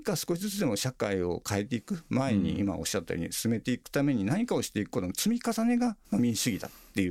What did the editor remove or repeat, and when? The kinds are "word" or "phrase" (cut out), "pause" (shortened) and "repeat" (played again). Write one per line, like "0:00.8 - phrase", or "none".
0:06.0 - pause